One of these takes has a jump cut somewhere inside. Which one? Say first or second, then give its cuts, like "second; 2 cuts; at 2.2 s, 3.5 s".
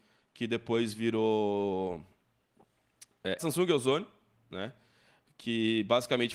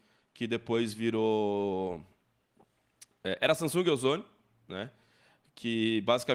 first; 1 cut; at 3.4 s